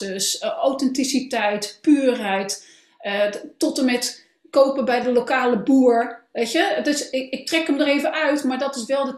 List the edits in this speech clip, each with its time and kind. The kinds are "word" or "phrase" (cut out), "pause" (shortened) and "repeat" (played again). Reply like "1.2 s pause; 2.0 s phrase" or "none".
none